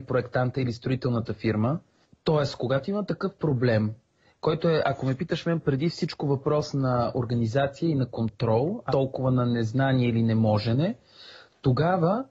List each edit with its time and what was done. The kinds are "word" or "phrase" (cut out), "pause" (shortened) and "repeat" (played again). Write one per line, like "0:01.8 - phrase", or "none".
0:08.9 - word